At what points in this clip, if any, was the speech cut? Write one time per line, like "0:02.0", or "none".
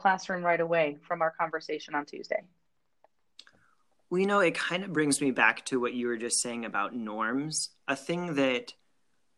none